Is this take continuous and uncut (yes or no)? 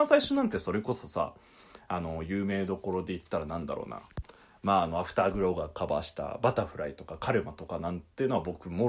yes